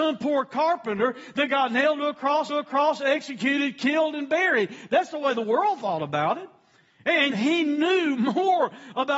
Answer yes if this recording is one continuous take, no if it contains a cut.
no